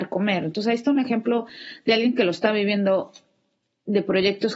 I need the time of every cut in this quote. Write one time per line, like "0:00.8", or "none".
none